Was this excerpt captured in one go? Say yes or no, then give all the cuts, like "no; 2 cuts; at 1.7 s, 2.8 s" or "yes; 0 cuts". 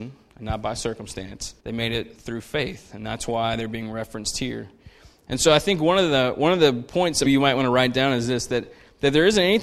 no; 2 cuts; at 1.6 s, 7.2 s